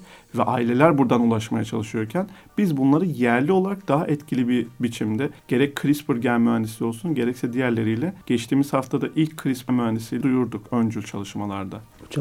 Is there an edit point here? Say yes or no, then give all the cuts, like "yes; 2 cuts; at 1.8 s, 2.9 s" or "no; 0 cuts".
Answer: yes; 4 cuts; at 5.4 s, 8.2 s, 9.7 s, 10.2 s